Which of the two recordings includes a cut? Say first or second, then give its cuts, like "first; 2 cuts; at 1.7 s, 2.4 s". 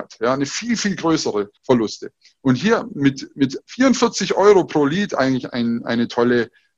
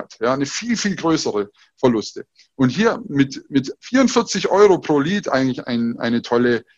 first; 1 cut; at 1.6 s